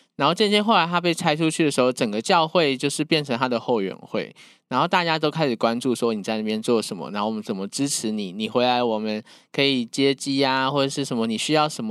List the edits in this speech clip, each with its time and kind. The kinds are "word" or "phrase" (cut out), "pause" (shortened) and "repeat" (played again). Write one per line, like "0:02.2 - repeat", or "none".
none